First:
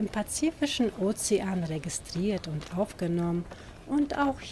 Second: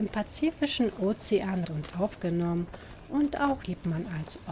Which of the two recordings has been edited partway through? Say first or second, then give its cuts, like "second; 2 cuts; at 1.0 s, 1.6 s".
second; 2 cuts; at 1.6 s, 3.6 s